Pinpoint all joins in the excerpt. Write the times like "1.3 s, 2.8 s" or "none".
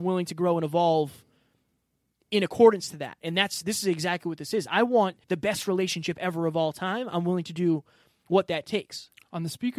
5.2 s